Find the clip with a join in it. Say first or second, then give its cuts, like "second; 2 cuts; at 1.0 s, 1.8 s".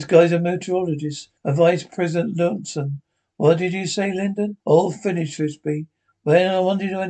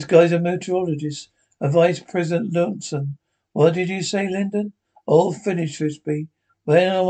first; 2 cuts; at 1.4 s, 4.6 s